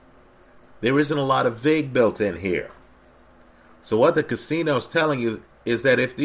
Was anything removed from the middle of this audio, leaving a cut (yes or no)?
no